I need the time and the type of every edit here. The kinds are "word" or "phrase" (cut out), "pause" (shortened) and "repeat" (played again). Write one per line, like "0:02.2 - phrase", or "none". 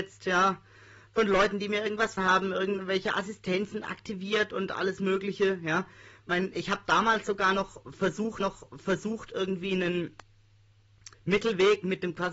0:02.2 - word
0:08.4 - repeat
0:11.1 - pause